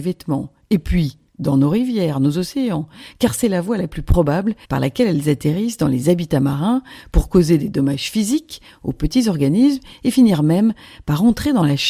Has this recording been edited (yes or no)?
yes